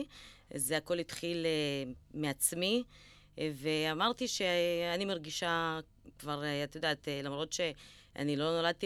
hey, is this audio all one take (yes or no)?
yes